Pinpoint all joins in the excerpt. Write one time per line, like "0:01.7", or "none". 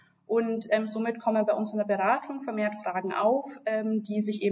none